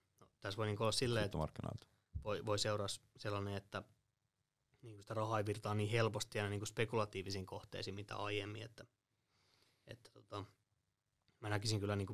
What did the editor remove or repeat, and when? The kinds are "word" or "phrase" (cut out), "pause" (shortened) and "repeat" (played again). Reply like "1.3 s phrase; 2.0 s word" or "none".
none